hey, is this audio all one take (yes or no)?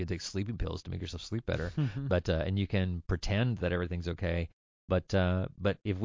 yes